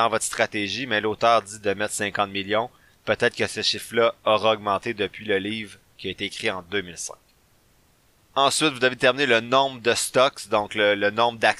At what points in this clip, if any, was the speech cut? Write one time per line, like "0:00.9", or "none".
none